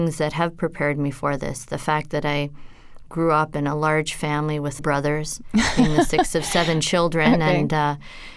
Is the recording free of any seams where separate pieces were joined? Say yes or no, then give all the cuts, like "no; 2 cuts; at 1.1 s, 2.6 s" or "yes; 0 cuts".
no; 1 cut; at 4.8 s